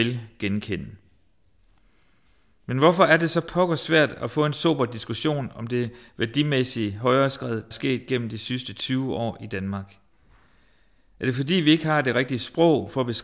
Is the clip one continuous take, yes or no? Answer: no